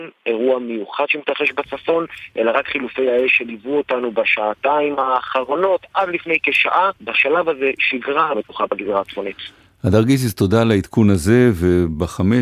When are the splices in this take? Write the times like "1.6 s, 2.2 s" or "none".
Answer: 7.0 s, 8.3 s